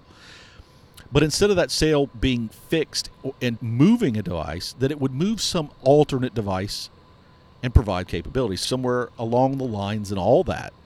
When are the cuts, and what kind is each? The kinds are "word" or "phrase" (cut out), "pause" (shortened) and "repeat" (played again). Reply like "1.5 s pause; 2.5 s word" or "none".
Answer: 3.6 s word; 8.1 s word; 8.6 s word